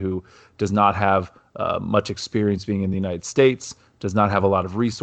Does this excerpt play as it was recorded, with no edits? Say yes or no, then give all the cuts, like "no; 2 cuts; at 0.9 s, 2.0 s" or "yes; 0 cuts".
yes; 0 cuts